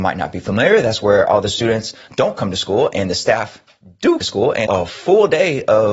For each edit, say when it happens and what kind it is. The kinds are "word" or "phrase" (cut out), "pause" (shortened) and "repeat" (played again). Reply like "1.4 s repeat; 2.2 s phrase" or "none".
2.1 s word; 4.2 s word; 4.7 s word